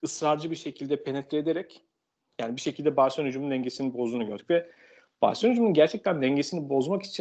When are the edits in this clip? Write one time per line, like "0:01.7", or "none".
none